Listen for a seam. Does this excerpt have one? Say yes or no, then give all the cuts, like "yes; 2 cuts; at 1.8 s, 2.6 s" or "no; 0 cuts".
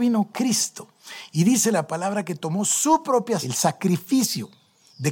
yes; 1 cut; at 3.4 s